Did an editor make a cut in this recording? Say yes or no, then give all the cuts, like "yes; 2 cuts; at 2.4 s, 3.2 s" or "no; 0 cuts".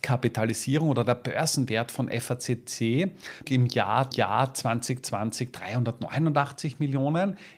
yes; 2 cuts; at 3.4 s, 4.1 s